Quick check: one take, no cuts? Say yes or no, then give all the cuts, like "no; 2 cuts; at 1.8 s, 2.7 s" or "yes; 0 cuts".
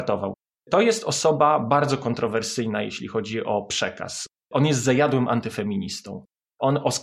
yes; 0 cuts